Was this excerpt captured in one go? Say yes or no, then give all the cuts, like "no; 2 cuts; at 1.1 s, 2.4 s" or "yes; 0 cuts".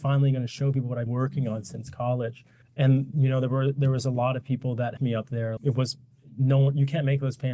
no; 4 cuts; at 1.1 s, 2.6 s, 5.0 s, 5.6 s